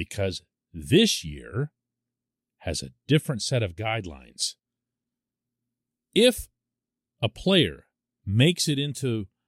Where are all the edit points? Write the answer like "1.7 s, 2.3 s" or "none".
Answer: none